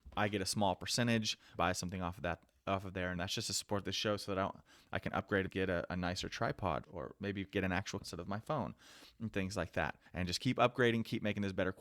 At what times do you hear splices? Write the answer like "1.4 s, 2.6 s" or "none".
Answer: 1.5 s, 3.2 s, 5.5 s, 6.8 s, 8.0 s, 10.1 s